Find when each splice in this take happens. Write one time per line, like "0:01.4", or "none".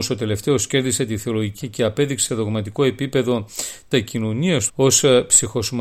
0:01.6
0:02.3
0:03.9
0:04.7